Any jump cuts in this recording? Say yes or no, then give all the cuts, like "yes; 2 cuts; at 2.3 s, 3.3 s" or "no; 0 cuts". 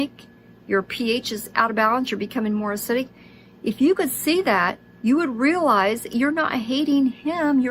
no; 0 cuts